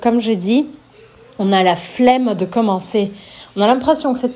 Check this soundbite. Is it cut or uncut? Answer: uncut